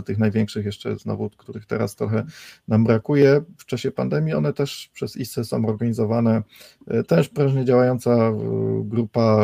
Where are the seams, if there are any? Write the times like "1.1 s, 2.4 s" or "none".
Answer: none